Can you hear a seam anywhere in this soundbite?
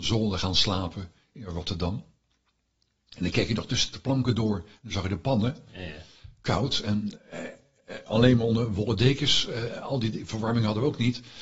no; 0 cuts

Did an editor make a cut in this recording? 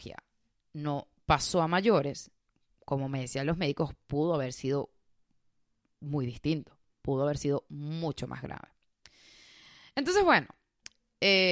no; 0 cuts

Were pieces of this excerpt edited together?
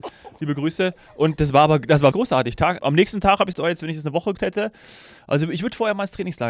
yes; 4 cuts; at 2.1 s, 2.8 s, 3.5 s, 4.3 s

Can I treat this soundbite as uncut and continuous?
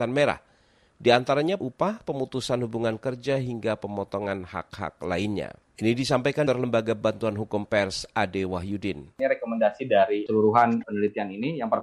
no; 3 cuts; at 1.6 s, 5.6 s, 6.5 s

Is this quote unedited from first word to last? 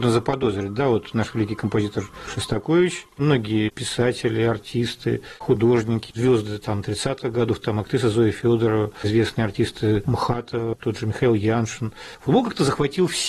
yes; 0 cuts

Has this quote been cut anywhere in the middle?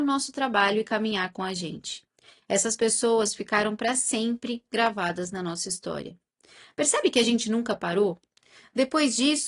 no; 0 cuts

